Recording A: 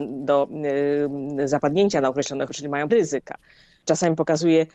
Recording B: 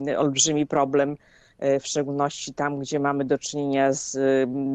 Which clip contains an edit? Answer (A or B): A